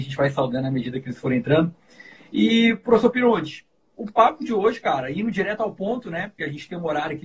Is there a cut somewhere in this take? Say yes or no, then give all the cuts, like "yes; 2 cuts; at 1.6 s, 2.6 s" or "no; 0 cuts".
no; 0 cuts